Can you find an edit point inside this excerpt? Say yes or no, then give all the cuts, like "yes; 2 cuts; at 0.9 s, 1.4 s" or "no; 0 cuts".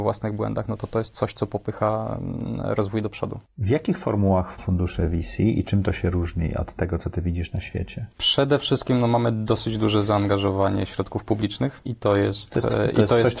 yes; 1 cut; at 4.6 s